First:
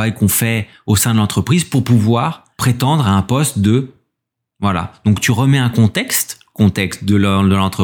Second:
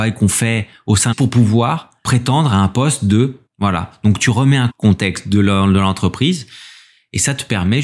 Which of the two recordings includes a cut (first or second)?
second